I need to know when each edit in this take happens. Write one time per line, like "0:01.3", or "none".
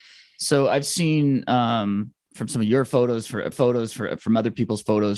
0:02.3
0:03.5